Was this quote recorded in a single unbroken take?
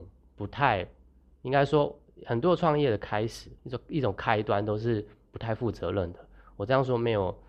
no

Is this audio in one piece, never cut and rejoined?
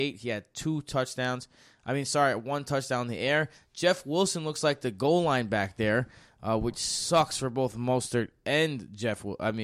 yes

